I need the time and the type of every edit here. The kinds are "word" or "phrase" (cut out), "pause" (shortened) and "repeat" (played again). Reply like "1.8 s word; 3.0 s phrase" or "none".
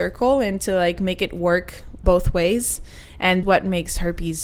2.0 s word; 3.4 s phrase